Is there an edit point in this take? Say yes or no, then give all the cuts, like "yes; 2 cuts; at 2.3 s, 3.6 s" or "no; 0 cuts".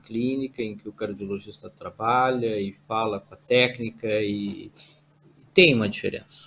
no; 0 cuts